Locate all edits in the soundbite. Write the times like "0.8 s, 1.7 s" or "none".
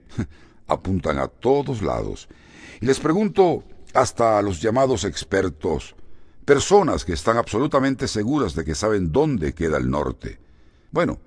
none